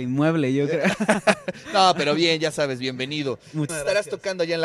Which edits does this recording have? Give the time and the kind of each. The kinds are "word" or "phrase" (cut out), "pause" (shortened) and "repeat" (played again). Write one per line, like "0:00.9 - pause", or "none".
0:03.7 - word